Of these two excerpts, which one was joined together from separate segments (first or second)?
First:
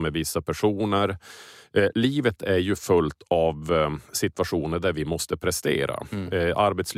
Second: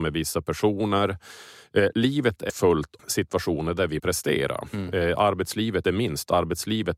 second